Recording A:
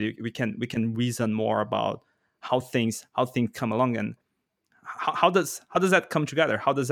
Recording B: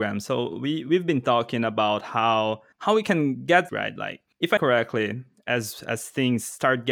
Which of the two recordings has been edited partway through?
B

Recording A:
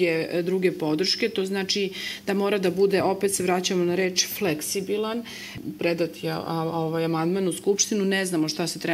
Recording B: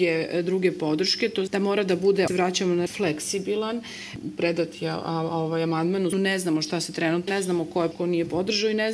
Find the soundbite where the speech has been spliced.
B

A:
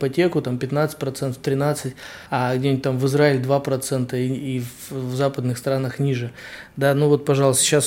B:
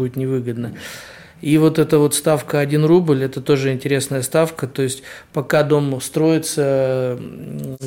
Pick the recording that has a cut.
A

